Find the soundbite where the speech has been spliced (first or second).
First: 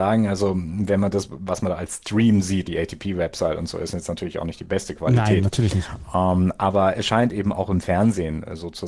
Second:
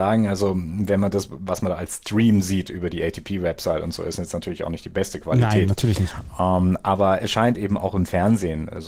first